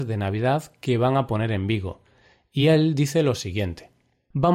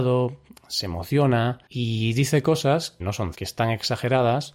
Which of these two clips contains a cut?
second; 3 cuts; at 1.7 s, 3.0 s, 3.3 s

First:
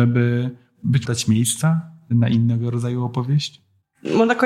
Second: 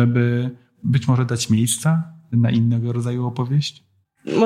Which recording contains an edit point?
first; 1 cut; at 1.1 s

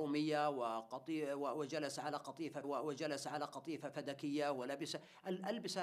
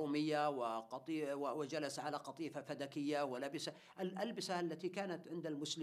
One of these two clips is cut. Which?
first; 1 cut; at 2.6 s

